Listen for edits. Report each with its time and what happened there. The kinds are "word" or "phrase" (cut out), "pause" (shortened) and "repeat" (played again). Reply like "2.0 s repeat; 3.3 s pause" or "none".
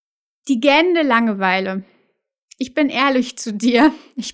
none